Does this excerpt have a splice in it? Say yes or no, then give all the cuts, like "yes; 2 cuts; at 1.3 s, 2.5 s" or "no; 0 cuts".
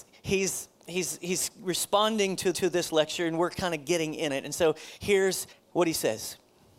yes; 3 cuts; at 2.5 s, 4.3 s, 5.5 s